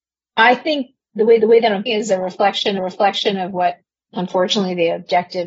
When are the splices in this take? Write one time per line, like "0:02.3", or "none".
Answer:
0:01.4
0:01.9
0:02.8